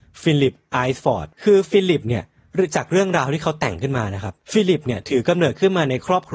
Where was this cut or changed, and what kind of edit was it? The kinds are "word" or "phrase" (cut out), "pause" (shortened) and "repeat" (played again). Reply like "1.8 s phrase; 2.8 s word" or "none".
1.3 s pause; 4.4 s pause